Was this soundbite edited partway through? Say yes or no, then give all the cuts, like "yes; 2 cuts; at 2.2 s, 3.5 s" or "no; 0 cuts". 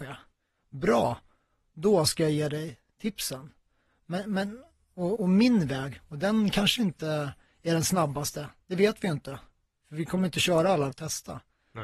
yes; 2 cuts; at 5.2 s, 10.9 s